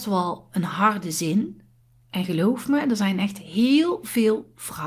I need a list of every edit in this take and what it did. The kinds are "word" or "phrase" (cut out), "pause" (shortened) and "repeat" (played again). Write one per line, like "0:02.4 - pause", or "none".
0:01.8 - pause